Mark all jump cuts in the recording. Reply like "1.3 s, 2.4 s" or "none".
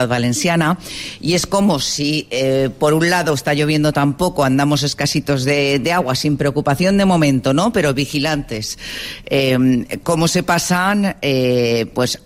none